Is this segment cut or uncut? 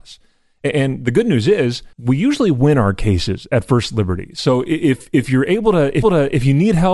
cut